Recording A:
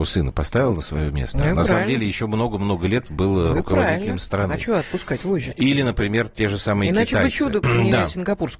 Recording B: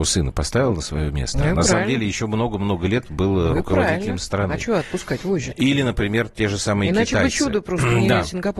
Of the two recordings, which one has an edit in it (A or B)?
A